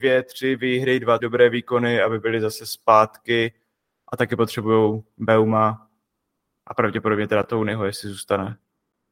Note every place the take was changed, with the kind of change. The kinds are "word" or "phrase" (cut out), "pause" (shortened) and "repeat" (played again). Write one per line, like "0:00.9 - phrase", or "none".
0:01.2 - word